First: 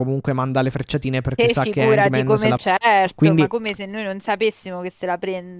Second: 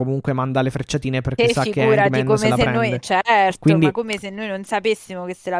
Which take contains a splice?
first; 1 cut; at 2.6 s

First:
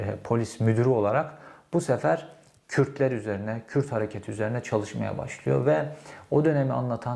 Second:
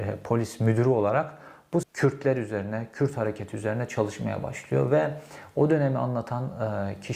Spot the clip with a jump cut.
second; 1 cut; at 1.8 s

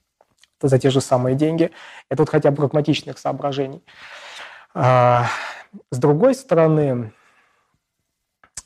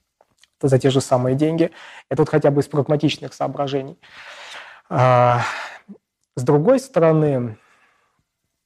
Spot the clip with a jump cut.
first; 2 cuts; at 2.5 s, 5.8 s

